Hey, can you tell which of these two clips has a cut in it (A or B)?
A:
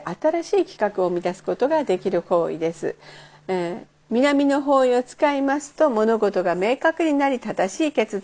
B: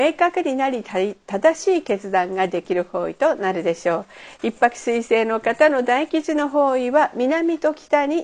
A